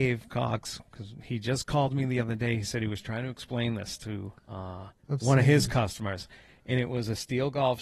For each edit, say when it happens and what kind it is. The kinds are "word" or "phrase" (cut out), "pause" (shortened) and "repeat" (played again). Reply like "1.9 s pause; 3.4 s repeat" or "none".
5.0 s pause

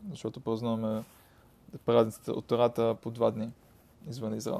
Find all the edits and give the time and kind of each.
none

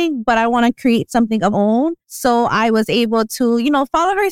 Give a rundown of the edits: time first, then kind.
1.5 s word; 2.0 s pause

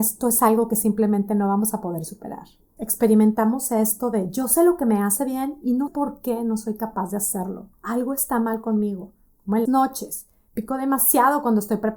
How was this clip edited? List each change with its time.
5.9 s word; 7.7 s pause; 9.7 s word

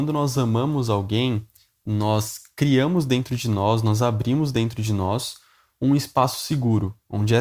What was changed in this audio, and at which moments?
none

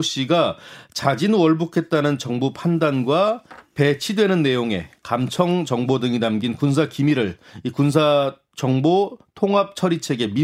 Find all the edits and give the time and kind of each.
none

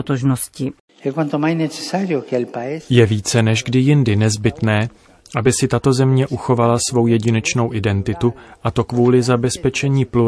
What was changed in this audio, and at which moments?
none

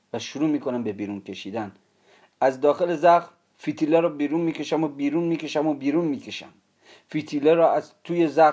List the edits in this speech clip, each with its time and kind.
none

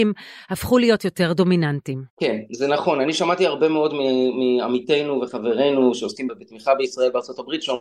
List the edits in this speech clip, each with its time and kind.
2.1 s pause; 6.3 s word

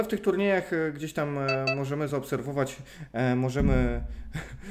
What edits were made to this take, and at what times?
none

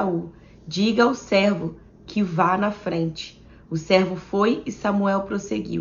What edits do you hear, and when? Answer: none

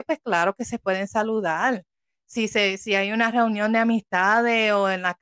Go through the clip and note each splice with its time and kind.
none

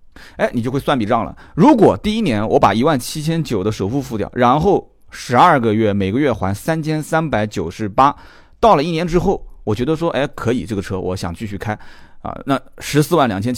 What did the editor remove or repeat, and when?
none

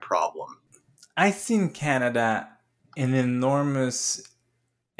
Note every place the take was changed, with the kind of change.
2.8 s pause

